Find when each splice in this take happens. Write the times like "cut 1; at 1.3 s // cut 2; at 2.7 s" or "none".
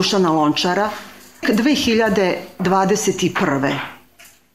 cut 1; at 1.4 s